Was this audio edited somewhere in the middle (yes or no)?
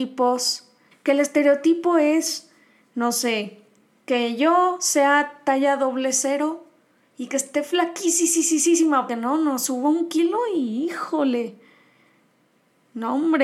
yes